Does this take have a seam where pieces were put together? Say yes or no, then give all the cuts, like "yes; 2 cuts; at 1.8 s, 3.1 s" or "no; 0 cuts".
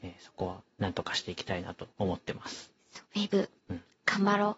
yes; 3 cuts; at 1.9 s, 3.0 s, 3.6 s